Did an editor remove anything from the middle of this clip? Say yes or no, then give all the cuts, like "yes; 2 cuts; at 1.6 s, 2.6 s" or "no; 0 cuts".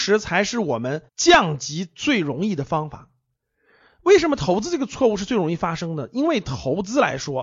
yes; 1 cut; at 1.1 s